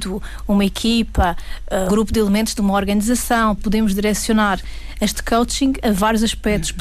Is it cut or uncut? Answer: cut